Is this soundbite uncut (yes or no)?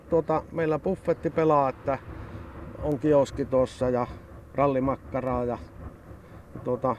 yes